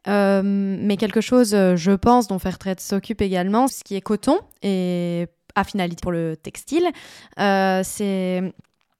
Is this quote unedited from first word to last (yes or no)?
no